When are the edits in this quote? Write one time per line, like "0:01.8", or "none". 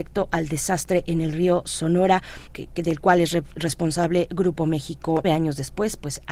0:02.5
0:05.2